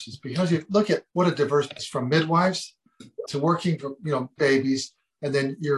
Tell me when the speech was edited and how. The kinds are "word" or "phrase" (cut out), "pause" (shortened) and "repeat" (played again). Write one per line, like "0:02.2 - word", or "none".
0:01.1 - pause
0:01.8 - word
0:03.3 - word
0:04.4 - word